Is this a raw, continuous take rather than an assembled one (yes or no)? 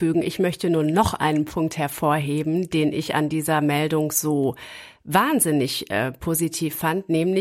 yes